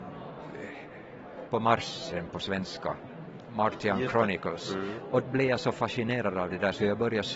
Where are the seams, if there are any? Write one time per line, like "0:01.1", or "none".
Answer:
0:01.5
0:02.1
0:05.2